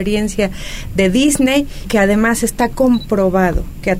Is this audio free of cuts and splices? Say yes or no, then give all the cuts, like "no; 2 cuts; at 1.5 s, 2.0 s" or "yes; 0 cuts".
no; 1 cut; at 1.8 s